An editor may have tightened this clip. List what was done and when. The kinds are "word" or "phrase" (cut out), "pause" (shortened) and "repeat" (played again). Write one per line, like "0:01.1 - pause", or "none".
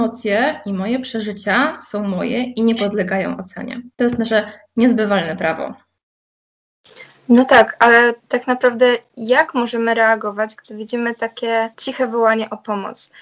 0:03.9 - pause
0:08.2 - pause
0:11.7 - pause